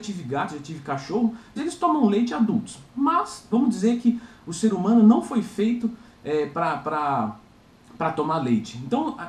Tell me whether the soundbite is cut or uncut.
cut